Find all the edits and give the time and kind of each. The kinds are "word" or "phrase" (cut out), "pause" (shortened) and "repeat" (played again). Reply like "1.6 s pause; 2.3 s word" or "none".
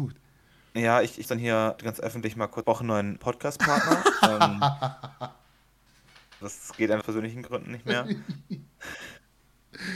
1.2 s word; 1.8 s word; 2.6 s word; 3.2 s word; 6.4 s word; 7.0 s word